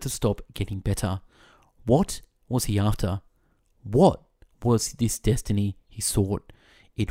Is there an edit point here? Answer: no; 0 cuts

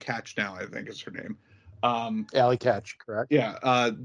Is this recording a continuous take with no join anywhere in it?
yes; 0 cuts

